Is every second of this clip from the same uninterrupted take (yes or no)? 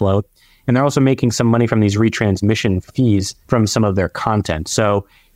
no